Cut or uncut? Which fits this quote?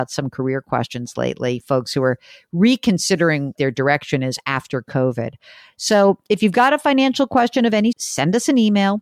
cut